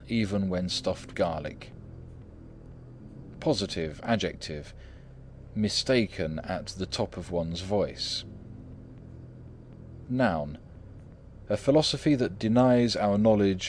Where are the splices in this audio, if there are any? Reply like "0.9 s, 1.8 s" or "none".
1.1 s, 10.1 s